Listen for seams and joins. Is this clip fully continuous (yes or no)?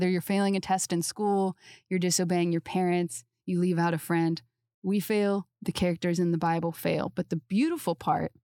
yes